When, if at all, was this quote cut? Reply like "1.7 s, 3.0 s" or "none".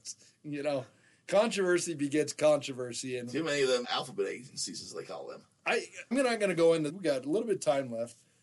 3.8 s, 6.1 s, 6.9 s